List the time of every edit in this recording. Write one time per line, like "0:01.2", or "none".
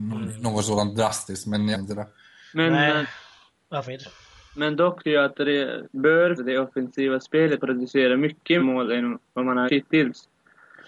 0:01.7
0:03.8
0:05.0
0:05.8
0:06.4
0:07.6
0:08.6
0:09.7